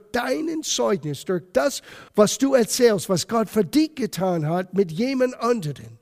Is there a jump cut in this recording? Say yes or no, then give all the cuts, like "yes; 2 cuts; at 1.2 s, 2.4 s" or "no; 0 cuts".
yes; 1 cut; at 2.1 s